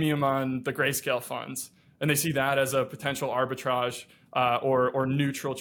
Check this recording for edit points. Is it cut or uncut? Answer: uncut